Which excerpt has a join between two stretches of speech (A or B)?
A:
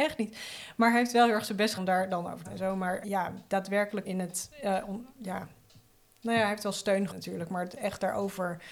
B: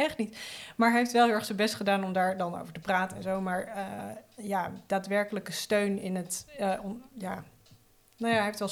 A